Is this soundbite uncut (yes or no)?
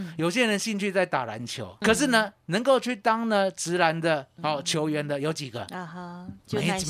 no